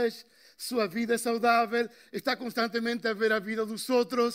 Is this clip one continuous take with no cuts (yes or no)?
yes